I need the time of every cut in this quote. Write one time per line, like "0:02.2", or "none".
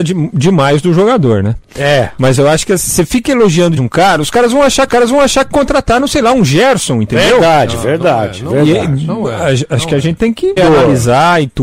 0:03.8
0:04.9
0:10.2
0:10.6